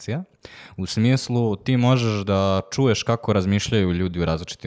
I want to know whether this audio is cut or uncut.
uncut